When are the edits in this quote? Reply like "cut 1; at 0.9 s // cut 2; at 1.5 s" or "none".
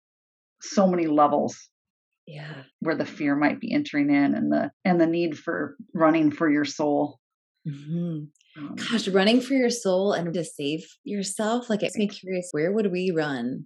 cut 1; at 2.7 s // cut 2; at 4.7 s // cut 3; at 5.9 s // cut 4; at 10.3 s // cut 5; at 11.9 s // cut 6; at 12.5 s

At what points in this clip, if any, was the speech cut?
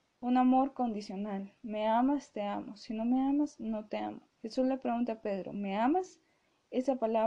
cut 1; at 4.3 s

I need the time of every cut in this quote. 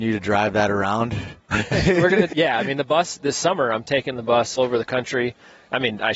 cut 1; at 1.5 s // cut 2; at 2.3 s // cut 3; at 4.6 s

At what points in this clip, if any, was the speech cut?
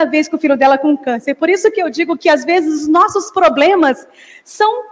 none

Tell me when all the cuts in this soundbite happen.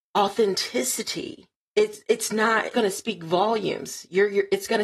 cut 1; at 1.6 s // cut 2; at 2.7 s

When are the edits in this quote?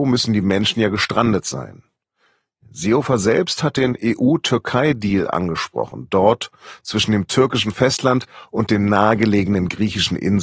none

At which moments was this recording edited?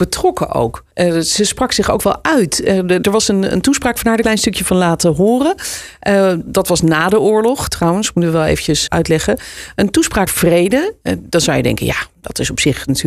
cut 1; at 0.9 s // cut 2; at 3.0 s // cut 3; at 4.2 s // cut 4; at 6.4 s // cut 5; at 8.9 s // cut 6; at 10.3 s

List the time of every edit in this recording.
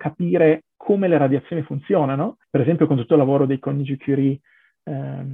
cut 1; at 2.4 s

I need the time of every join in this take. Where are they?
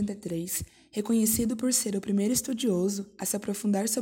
none

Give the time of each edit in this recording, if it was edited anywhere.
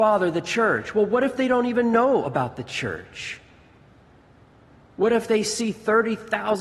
none

